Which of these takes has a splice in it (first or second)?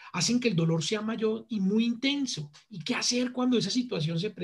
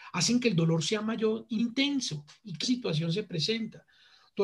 second